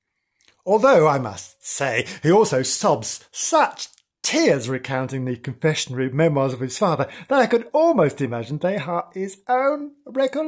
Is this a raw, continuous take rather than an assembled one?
yes; 0 cuts

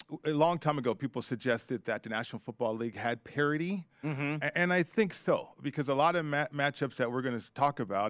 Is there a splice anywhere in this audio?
no; 0 cuts

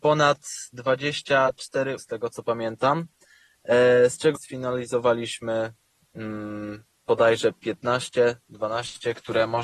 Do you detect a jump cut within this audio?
yes; 3 cuts; at 2.0 s, 4.4 s, 6.9 s

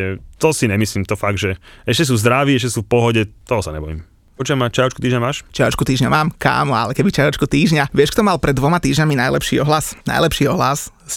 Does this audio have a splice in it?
yes; 1 cut; at 10.0 s

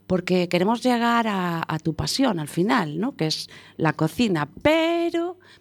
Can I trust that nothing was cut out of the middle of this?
yes; 0 cuts

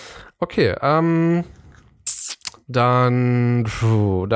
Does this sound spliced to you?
no; 0 cuts

